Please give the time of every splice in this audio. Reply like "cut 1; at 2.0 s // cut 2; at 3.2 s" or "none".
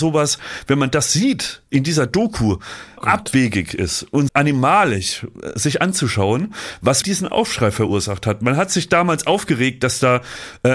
cut 1; at 1.7 s // cut 2; at 3.0 s // cut 3; at 4.3 s // cut 4; at 7.0 s